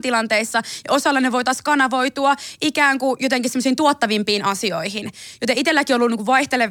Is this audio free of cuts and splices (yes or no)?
yes